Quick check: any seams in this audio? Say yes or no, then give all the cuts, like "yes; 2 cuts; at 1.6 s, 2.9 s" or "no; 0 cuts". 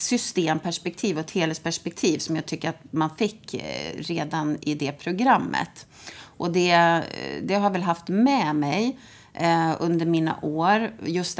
no; 0 cuts